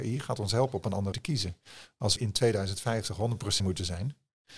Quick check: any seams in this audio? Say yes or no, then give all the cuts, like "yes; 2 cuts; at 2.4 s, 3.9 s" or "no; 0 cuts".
yes; 3 cuts; at 1.1 s, 2.2 s, 3.6 s